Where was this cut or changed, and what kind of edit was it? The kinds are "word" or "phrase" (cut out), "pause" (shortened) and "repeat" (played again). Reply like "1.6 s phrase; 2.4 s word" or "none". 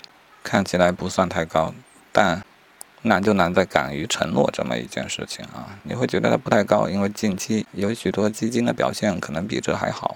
none